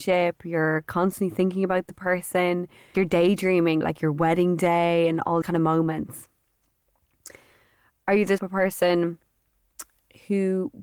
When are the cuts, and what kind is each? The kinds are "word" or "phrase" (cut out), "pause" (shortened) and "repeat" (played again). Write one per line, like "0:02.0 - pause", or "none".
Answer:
0:02.9 - word
0:03.8 - word
0:05.4 - word
0:08.4 - word